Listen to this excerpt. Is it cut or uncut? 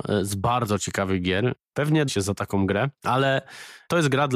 cut